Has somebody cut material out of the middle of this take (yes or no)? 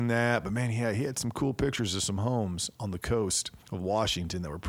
yes